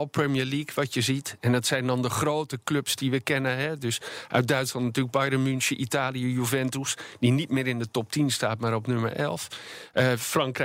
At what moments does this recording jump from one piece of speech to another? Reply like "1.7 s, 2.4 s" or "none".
none